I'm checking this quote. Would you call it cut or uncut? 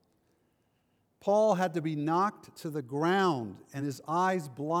uncut